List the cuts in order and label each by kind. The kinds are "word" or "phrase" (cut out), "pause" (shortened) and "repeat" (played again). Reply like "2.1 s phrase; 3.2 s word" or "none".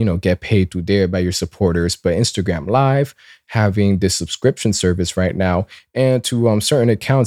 none